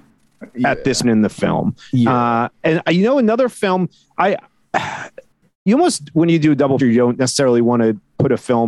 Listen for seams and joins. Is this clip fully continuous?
no; 2 cuts; at 1.0 s, 6.8 s

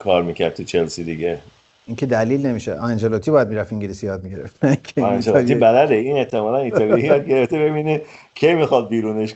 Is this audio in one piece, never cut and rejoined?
yes; 0 cuts

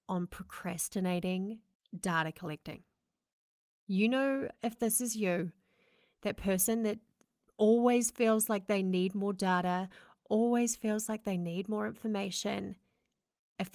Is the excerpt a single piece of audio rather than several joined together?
yes; 0 cuts

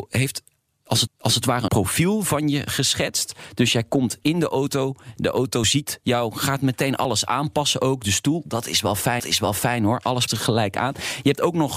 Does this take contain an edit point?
yes; 4 cuts; at 1.1 s, 1.7 s, 9.2 s, 10.3 s

